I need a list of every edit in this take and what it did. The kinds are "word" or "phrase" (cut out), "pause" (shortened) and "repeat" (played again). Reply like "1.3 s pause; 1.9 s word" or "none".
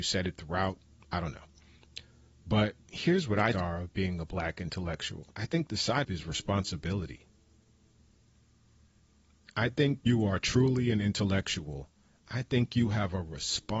2.8 s pause; 3.5 s phrase; 5.3 s pause; 6.0 s word; 10.1 s word